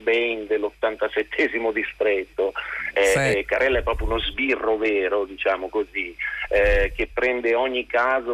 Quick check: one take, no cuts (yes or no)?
yes